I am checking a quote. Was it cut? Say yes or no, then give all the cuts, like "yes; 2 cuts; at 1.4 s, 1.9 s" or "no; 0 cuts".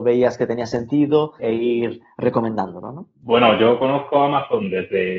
yes; 2 cuts; at 1.4 s, 3.1 s